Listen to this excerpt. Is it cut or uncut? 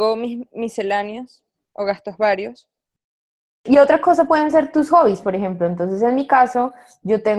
uncut